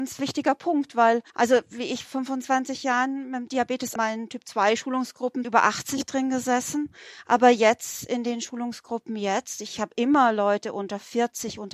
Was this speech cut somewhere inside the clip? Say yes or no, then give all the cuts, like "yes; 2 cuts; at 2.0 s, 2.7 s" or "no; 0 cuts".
yes; 4 cuts; at 1.3 s, 2.1 s, 4.0 s, 5.4 s